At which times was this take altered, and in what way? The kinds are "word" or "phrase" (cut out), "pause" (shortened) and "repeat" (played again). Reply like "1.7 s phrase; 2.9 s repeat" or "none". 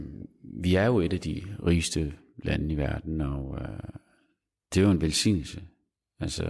none